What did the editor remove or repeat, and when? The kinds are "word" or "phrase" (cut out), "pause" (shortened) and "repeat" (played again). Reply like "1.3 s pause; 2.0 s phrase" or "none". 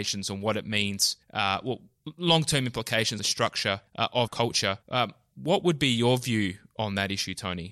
1.2 s pause; 3.2 s word; 3.9 s pause; 4.3 s phrase; 4.8 s pause